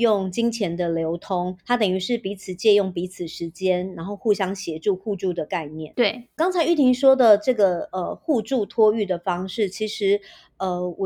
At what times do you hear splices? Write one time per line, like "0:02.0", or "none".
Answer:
0:01.6